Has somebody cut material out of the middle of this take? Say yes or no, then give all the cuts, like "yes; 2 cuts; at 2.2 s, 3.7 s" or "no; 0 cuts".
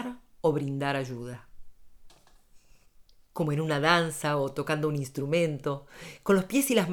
yes; 1 cut; at 3.1 s